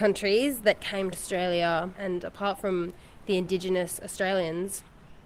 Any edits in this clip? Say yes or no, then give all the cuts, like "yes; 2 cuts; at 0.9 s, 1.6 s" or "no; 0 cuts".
yes; 1 cut; at 1.1 s